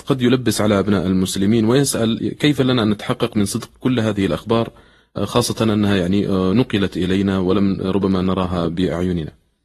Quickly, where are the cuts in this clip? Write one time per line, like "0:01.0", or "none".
none